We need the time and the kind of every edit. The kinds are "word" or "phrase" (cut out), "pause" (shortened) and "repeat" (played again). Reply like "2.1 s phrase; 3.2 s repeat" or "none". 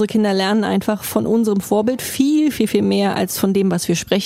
2.5 s word